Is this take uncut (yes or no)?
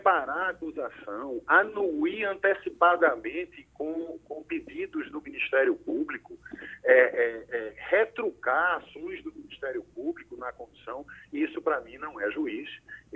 yes